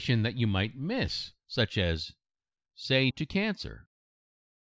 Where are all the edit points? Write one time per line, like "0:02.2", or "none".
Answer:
0:03.1